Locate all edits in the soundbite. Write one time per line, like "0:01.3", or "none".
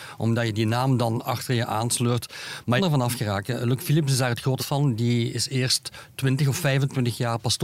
0:02.8
0:04.6